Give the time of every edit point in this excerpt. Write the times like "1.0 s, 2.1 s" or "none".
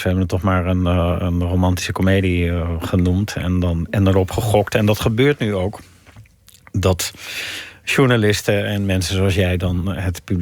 none